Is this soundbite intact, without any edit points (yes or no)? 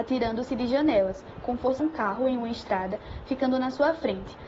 no